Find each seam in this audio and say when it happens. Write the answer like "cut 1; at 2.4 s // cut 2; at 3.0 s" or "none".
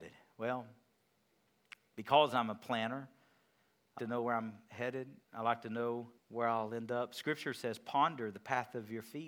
cut 1; at 4.0 s // cut 2; at 5.2 s // cut 3; at 6.2 s